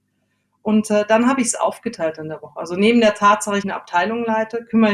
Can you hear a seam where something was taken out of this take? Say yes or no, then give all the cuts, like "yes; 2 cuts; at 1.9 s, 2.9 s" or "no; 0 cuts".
yes; 1 cut; at 3.6 s